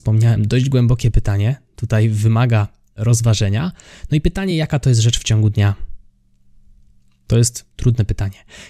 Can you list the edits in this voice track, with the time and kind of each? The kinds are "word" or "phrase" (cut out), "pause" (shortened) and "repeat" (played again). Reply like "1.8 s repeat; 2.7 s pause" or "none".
none